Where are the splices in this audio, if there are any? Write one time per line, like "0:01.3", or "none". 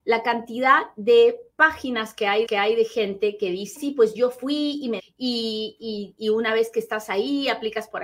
0:02.4
0:03.8
0:05.0